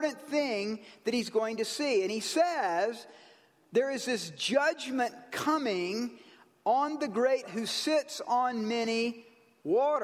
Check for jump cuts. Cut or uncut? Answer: cut